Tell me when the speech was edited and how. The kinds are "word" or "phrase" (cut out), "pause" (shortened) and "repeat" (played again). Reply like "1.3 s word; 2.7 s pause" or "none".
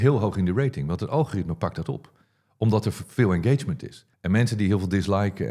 4.1 s pause